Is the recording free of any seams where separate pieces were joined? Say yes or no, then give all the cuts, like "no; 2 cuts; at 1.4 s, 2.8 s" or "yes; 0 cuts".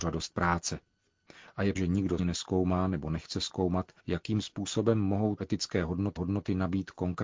no; 5 cuts; at 1.8 s, 2.2 s, 4.0 s, 5.4 s, 6.2 s